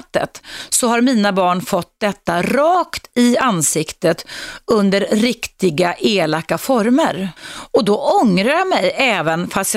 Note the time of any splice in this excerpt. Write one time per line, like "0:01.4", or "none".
0:07.4